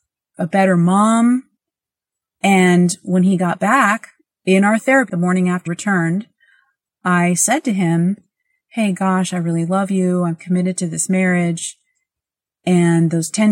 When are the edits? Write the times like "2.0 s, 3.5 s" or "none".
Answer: 5.1 s, 5.7 s